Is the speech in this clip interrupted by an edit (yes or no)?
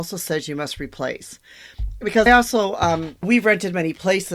yes